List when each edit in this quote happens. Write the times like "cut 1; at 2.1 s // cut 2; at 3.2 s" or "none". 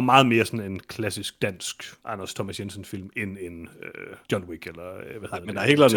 cut 1; at 2.0 s // cut 2; at 4.2 s